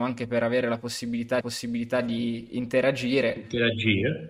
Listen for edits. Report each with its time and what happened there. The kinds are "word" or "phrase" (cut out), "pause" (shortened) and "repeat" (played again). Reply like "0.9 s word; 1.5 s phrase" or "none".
1.4 s repeat